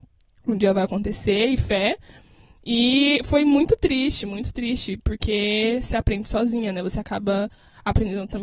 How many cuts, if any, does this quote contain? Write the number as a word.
zero